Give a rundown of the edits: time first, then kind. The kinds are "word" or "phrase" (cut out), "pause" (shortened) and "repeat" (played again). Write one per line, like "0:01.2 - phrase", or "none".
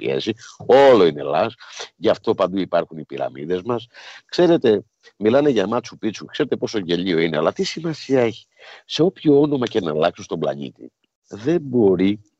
none